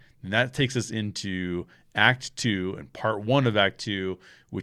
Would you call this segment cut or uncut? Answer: uncut